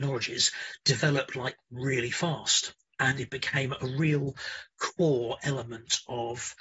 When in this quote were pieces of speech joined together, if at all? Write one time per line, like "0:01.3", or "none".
none